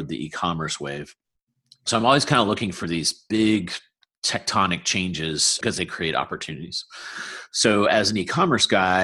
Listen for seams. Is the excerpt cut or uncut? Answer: uncut